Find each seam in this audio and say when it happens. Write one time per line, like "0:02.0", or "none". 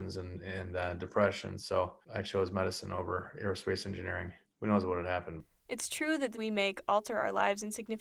0:02.0
0:04.4
0:06.3